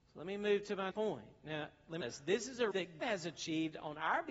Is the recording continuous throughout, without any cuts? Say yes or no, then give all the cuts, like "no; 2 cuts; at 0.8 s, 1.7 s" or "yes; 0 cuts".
no; 4 cuts; at 0.9 s, 2.0 s, 2.7 s, 3.0 s